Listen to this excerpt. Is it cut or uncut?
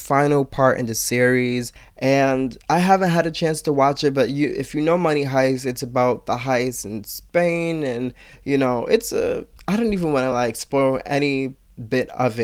uncut